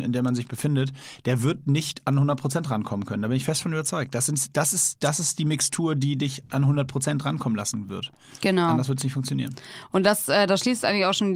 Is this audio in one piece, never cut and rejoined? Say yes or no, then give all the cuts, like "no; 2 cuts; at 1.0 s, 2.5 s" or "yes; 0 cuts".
yes; 0 cuts